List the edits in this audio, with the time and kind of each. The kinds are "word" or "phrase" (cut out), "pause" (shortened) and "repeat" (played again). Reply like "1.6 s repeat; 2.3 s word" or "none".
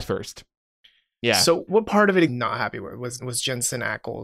1.7 s word; 2.3 s phrase; 3.2 s word